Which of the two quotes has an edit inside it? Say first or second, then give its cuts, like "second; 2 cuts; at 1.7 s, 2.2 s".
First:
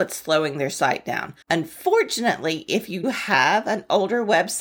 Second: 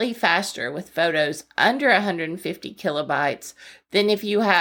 first; 2 cuts; at 1.4 s, 3.0 s